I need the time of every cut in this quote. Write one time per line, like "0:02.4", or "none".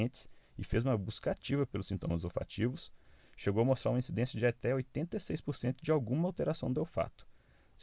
none